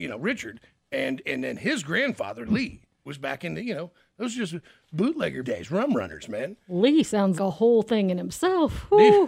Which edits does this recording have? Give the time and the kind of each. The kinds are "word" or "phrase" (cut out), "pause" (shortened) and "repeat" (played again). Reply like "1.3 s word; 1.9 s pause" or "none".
3.1 s word; 5.4 s word; 7.4 s word